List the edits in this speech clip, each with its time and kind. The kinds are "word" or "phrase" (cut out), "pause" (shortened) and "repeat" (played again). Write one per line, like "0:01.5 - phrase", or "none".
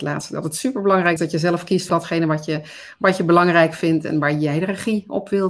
0:01.2 - word
0:01.9 - word